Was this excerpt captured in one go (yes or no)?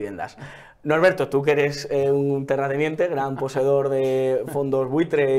yes